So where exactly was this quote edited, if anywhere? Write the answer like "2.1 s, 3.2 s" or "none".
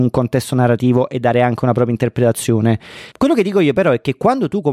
3.1 s